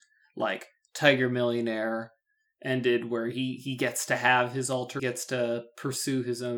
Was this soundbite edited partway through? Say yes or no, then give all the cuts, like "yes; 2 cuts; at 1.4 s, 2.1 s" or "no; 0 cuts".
yes; 1 cut; at 5.0 s